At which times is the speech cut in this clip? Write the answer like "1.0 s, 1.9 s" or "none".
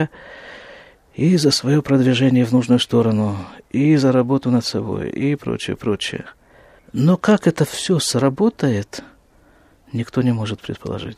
5.4 s